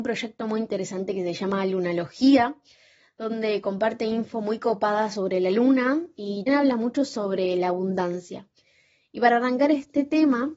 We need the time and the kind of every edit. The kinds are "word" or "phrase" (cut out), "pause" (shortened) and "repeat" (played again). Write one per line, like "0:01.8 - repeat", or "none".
0:06.5 - word